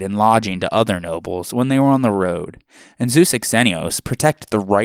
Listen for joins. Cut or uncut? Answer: uncut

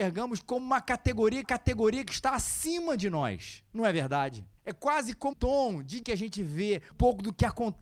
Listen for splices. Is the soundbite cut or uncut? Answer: cut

